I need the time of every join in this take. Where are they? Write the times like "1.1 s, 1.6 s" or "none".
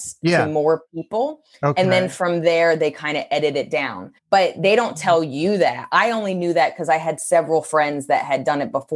4.2 s